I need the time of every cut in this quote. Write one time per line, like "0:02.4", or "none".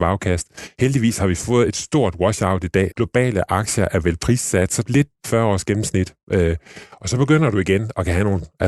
0:02.9
0:04.8
0:05.2

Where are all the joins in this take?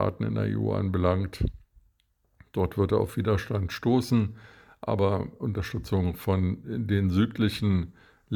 none

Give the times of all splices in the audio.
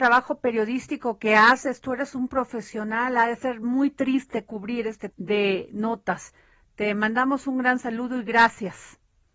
0:05.1

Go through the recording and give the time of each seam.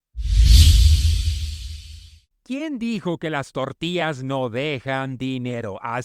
0:02.3

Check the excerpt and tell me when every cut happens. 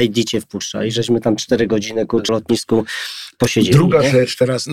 0:02.3

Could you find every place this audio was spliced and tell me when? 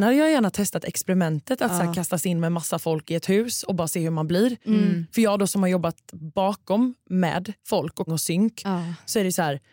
0:07.6
0:08.1

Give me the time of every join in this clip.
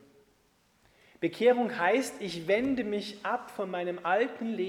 none

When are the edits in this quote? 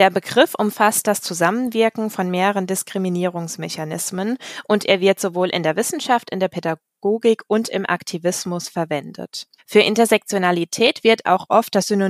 0:09.6

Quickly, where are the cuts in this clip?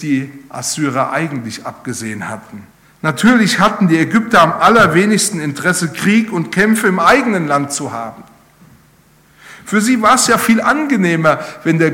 0:02.7

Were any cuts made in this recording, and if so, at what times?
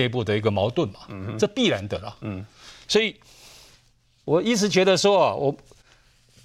none

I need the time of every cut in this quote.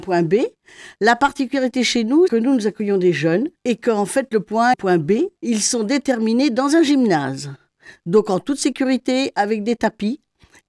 0:02.3
0:03.6
0:04.7
0:05.4

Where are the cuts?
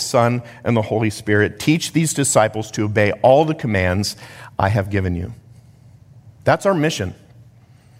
none

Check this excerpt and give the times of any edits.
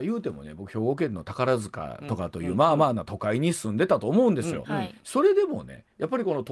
none

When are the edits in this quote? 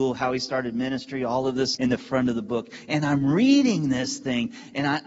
0:01.7

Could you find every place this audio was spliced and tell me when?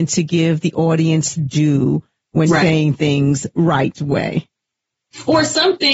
0:01.4
0:02.5
0:03.5

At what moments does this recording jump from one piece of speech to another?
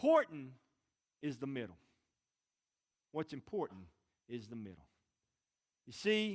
none

